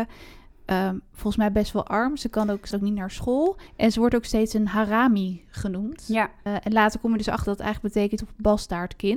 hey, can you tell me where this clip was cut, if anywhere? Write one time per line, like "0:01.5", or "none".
0:02.7
0:03.7
0:06.5
0:07.4
0:08.2